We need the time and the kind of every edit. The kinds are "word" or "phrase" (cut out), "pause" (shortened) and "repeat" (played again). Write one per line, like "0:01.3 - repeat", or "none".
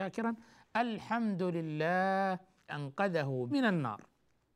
0:02.7 - word
0:03.5 - word